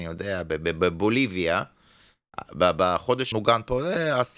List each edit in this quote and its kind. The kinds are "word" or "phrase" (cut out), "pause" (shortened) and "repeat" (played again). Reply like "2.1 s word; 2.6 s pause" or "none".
3.3 s word